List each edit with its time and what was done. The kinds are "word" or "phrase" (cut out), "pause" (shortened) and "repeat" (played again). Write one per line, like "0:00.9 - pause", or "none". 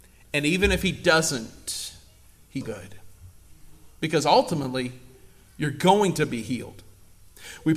0:02.6 - word